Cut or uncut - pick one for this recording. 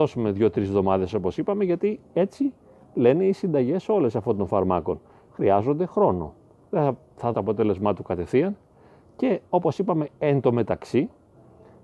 cut